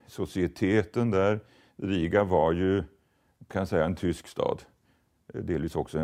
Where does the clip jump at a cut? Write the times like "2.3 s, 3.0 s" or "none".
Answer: 3.5 s